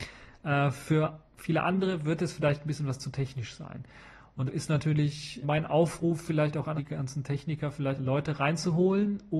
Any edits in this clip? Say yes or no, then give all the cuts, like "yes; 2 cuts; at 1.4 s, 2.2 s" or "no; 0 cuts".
yes; 5 cuts; at 1.3 s, 4.5 s, 5.4 s, 6.8 s, 8.0 s